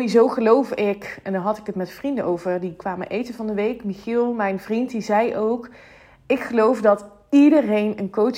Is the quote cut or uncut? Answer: uncut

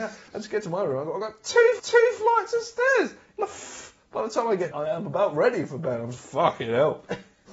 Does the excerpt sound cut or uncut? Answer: cut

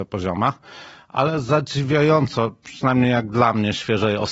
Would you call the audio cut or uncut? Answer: uncut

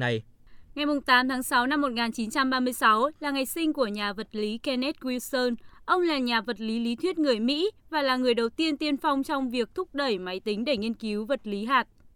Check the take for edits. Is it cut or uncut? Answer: uncut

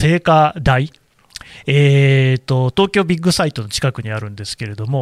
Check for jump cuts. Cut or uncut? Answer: uncut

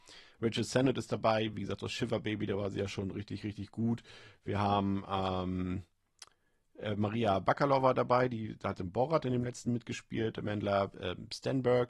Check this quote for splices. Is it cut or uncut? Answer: uncut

